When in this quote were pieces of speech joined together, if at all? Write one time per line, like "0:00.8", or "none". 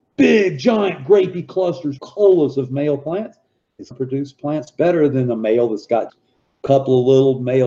0:02.0
0:03.9
0:06.1